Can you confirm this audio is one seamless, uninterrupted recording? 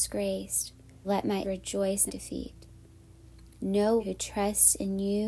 no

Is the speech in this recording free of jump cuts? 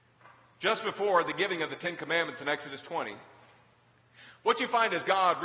yes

